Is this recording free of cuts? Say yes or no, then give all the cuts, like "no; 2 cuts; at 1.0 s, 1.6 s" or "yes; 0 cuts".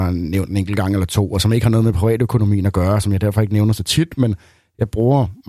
yes; 0 cuts